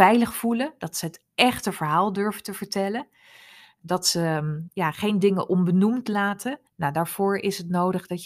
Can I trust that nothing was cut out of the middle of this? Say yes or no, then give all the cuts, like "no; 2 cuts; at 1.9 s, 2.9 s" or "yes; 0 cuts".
no; 2 cuts; at 3.8 s, 6.7 s